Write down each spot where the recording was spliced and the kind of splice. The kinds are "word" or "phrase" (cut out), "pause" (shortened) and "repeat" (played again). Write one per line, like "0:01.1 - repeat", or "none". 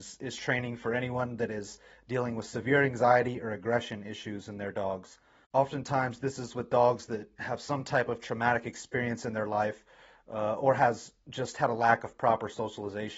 none